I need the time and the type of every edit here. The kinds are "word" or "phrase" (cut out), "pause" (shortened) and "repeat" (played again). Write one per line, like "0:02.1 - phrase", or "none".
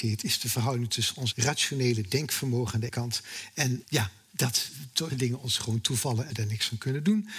0:01.3 - word
0:02.9 - word
0:03.8 - word
0:05.1 - word
0:06.3 - word